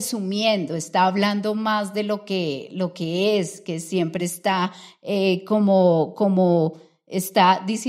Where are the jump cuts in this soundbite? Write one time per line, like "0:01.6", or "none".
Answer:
none